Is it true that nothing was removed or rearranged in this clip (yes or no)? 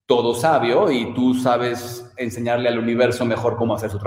yes